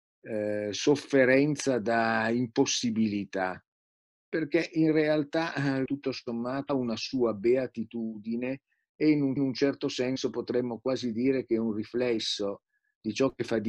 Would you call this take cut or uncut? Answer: cut